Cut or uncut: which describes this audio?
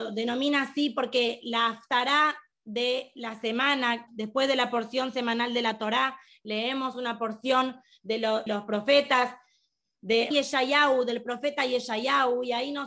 cut